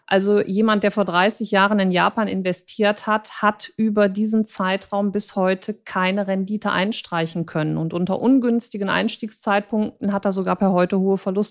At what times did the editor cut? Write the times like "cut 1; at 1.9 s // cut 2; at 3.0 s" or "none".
none